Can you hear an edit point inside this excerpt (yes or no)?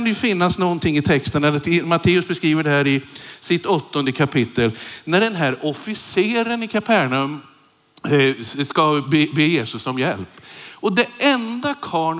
no